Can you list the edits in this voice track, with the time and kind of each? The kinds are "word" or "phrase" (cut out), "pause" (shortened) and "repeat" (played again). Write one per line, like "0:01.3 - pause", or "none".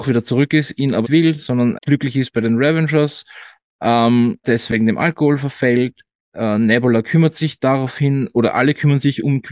0:01.0 - word
0:01.7 - word
0:04.4 - word

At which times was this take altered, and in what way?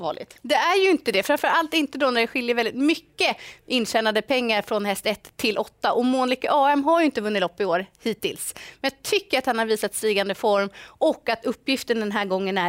none

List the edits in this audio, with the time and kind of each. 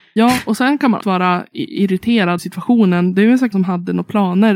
0:01.0 - word
0:02.4 - word
0:03.5 - word

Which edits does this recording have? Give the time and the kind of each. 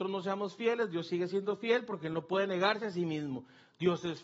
none

